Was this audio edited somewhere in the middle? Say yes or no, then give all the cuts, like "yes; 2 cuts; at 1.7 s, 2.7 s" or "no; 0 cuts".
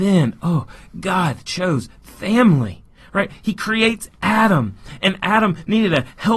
no; 0 cuts